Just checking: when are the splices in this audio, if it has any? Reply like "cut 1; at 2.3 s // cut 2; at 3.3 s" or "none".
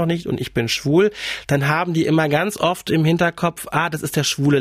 none